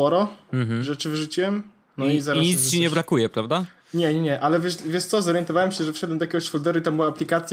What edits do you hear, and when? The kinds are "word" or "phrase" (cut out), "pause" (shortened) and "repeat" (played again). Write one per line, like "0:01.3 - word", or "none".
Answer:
none